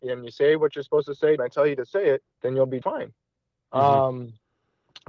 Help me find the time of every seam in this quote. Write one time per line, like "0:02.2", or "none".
0:01.4
0:02.3
0:02.8